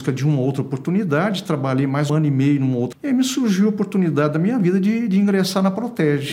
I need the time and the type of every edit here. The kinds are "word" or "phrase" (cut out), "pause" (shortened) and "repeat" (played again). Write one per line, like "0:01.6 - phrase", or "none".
0:02.1 - word
0:02.9 - word